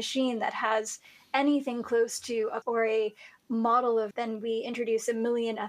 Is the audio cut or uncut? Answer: cut